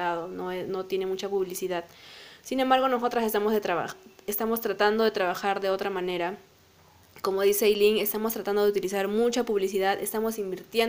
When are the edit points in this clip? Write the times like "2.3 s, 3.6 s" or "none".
none